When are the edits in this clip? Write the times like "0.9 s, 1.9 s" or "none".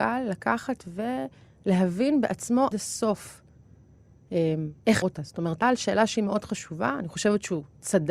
2.7 s, 5.0 s, 5.6 s